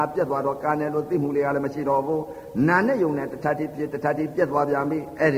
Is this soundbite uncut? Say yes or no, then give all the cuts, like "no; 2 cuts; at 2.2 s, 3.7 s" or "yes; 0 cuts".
yes; 0 cuts